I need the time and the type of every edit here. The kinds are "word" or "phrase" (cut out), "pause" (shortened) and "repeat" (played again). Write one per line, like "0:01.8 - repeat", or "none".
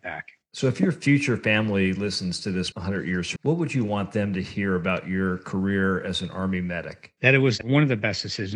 0:02.7 - word
0:03.4 - word